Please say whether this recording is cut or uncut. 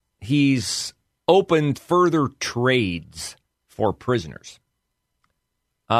cut